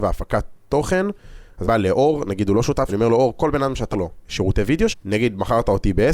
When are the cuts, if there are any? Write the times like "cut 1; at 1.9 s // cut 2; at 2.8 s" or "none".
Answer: cut 1; at 1.6 s // cut 2; at 2.9 s // cut 3; at 3.9 s // cut 4; at 4.2 s // cut 5; at 4.9 s